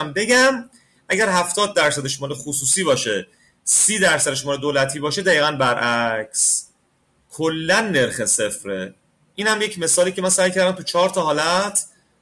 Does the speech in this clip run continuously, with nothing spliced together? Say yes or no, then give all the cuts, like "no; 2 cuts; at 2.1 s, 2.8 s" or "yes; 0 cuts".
yes; 0 cuts